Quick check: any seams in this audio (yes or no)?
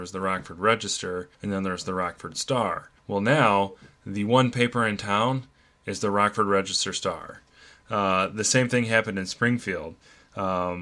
yes